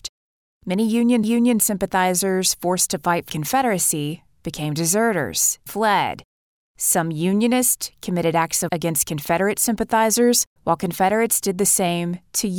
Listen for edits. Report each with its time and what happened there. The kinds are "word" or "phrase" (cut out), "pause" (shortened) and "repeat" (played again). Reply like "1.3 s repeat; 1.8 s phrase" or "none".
1.2 s repeat; 3.3 s word; 5.7 s word; 8.7 s word; 10.6 s pause